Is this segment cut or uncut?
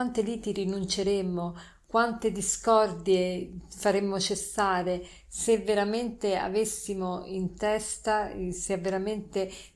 uncut